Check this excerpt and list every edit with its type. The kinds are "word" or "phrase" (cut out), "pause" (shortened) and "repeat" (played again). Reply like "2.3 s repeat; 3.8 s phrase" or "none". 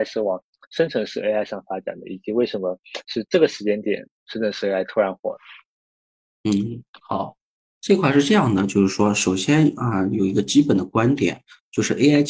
none